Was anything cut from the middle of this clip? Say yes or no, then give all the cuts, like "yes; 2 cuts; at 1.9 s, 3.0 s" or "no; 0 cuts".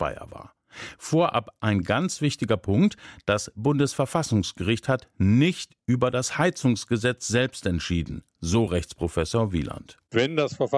no; 0 cuts